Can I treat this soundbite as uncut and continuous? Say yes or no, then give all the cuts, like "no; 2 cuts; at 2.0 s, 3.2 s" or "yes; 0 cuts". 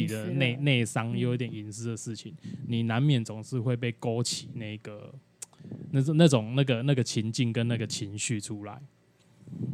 yes; 0 cuts